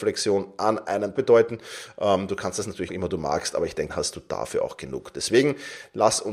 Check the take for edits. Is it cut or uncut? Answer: cut